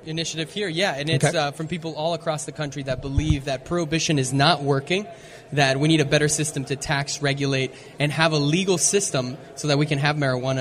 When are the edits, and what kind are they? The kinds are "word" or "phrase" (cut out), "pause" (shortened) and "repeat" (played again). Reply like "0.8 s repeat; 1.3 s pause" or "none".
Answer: none